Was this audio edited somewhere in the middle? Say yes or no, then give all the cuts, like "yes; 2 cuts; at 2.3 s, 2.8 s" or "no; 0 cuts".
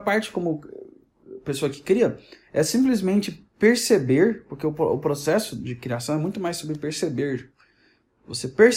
no; 0 cuts